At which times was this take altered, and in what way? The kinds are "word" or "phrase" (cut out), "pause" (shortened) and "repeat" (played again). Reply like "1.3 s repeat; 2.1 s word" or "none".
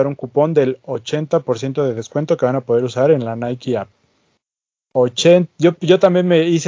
none